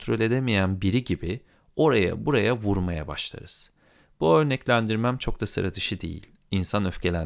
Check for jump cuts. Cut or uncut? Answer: uncut